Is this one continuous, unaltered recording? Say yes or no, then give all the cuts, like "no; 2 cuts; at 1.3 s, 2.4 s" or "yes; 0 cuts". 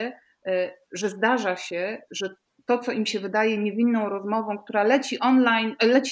yes; 0 cuts